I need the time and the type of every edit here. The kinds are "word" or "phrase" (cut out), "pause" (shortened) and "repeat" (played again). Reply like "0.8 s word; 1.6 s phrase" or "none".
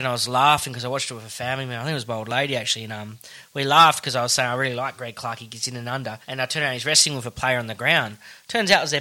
6.2 s pause